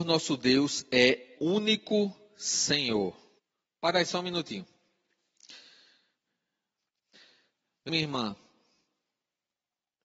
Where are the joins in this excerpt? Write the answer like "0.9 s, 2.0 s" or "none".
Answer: 1.4 s, 3.4 s, 7.9 s